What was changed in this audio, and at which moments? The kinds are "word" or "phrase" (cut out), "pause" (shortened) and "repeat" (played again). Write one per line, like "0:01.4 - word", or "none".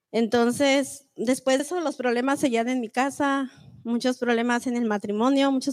0:01.6 - word

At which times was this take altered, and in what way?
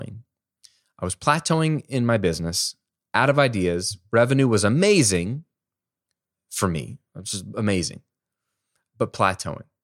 none

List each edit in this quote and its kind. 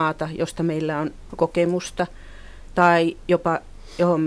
0:01.3 - word

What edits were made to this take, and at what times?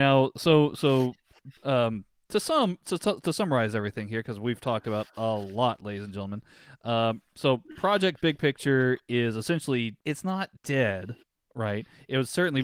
0:01.6 - pause
0:10.0 - pause
0:10.6 - pause

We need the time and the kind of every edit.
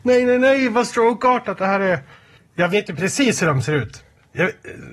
0:02.4 - pause

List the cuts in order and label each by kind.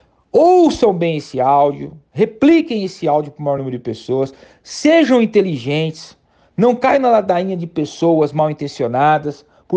none

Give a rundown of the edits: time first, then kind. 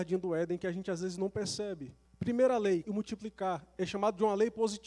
0:02.0 - pause
0:02.8 - word

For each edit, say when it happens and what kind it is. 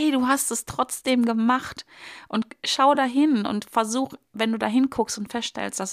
none

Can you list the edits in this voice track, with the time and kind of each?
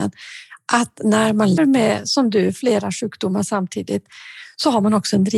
0:01.6 - word

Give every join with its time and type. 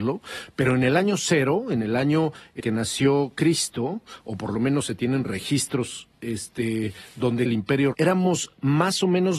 0:02.6 - word
0:07.5 - word
0:07.9 - word

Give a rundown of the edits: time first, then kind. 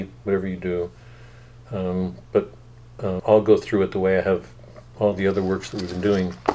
0:03.2 - word

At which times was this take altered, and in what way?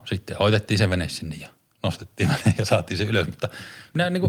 none

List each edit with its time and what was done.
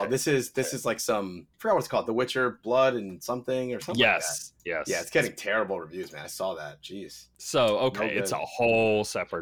0:04.6 - pause

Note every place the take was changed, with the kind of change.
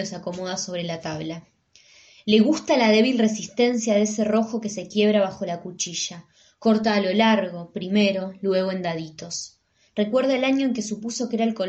none

